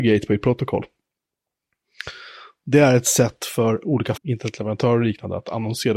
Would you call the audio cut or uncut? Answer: cut